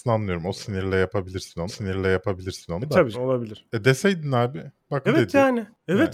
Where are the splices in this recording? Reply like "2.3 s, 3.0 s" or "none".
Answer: 1.7 s, 3.1 s, 5.1 s